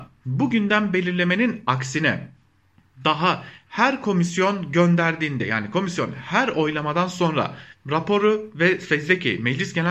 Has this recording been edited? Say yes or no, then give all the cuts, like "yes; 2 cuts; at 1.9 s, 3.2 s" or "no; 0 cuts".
no; 0 cuts